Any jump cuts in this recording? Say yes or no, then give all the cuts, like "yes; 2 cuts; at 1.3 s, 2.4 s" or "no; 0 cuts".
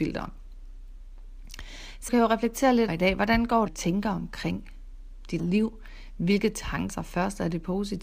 yes; 5 cuts; at 2.1 s, 2.9 s, 3.7 s, 5.4 s, 6.9 s